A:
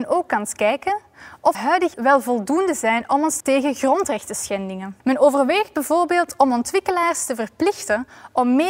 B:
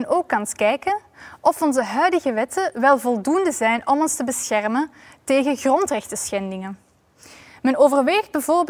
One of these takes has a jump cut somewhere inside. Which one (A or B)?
A